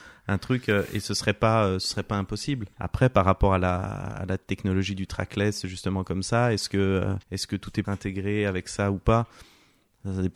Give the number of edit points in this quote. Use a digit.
3